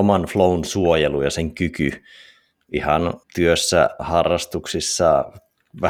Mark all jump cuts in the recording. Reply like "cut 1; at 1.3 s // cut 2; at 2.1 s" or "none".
cut 1; at 3.2 s